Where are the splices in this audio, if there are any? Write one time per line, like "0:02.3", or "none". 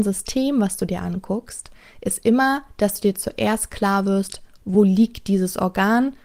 none